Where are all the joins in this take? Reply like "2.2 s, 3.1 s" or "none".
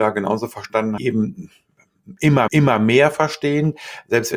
1.0 s, 2.5 s